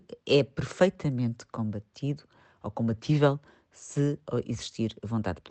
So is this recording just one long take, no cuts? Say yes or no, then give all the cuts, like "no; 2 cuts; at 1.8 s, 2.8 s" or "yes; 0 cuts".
yes; 0 cuts